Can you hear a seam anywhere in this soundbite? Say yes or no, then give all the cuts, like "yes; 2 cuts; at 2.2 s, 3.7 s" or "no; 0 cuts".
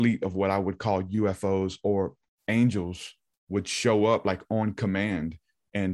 no; 0 cuts